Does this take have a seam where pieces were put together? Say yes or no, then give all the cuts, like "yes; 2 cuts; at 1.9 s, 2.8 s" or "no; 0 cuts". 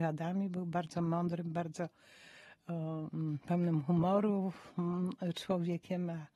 no; 0 cuts